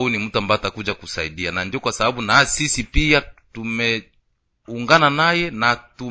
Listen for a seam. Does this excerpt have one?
no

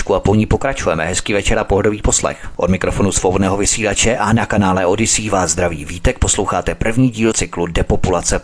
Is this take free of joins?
no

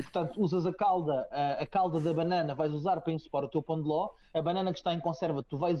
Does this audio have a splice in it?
no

